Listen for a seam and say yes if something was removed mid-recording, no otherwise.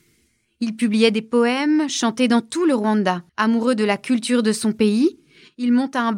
yes